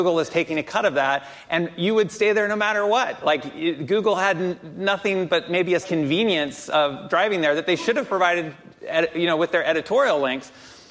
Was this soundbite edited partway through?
yes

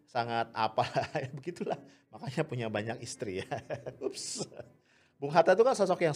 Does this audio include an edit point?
no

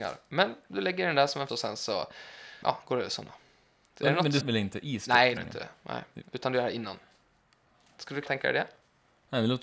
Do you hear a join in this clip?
yes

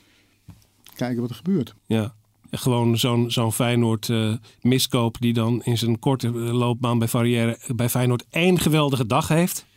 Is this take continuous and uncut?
no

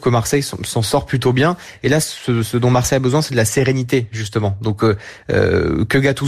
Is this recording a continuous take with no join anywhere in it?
yes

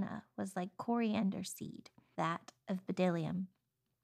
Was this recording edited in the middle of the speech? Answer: yes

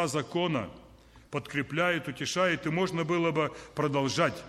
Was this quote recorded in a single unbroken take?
yes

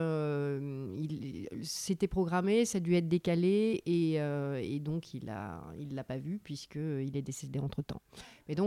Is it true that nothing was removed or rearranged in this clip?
yes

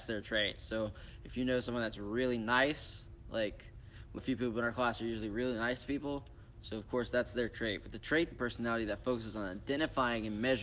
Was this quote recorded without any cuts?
no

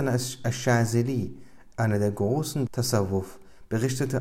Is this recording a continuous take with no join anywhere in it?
no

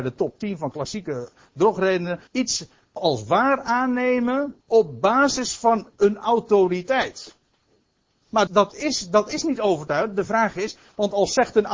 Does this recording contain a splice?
yes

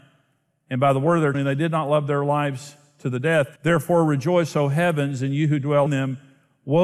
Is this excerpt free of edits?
no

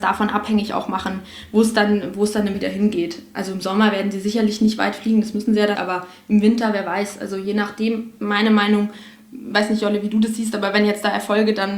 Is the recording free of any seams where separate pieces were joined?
no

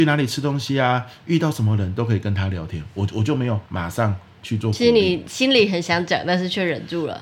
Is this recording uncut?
no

